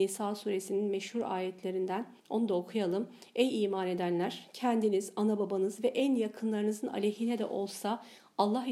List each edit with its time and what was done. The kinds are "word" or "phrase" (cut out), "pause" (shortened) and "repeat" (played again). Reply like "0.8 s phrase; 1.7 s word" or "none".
2.2 s pause